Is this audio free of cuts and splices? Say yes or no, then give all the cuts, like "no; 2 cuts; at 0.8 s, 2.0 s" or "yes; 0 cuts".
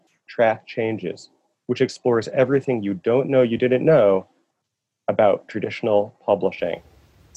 yes; 0 cuts